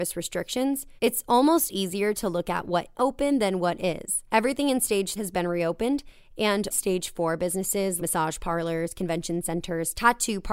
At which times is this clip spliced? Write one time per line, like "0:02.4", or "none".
0:01.0
0:02.9
0:04.3
0:05.2
0:06.7
0:08.0